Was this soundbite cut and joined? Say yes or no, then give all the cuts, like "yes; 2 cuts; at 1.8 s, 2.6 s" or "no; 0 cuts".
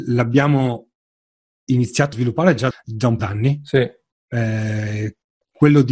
yes; 3 cuts; at 2.1 s, 2.7 s, 3.2 s